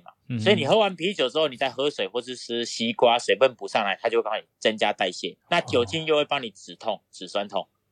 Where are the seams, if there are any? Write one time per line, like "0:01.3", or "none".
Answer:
0:05.4